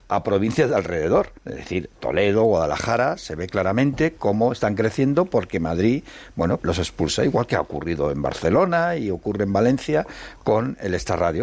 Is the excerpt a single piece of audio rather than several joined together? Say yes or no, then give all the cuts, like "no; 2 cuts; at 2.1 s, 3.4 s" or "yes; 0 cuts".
no; 2 cuts; at 1.4 s, 6.6 s